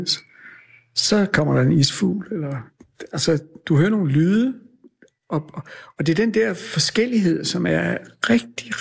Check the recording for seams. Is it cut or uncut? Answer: uncut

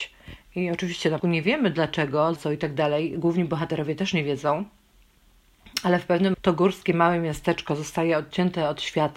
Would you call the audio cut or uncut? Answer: cut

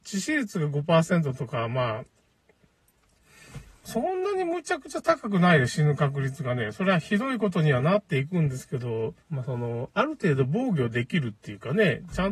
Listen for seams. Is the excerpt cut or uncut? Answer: cut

